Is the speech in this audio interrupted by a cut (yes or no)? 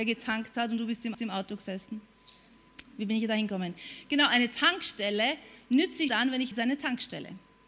yes